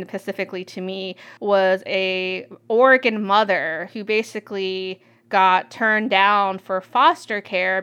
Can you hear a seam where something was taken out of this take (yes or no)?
yes